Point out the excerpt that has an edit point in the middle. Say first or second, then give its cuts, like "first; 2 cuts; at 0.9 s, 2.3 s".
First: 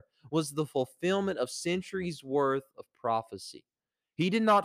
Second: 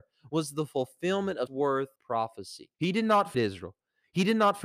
second; 4 cuts; at 1.5 s, 2.0 s, 2.7 s, 3.3 s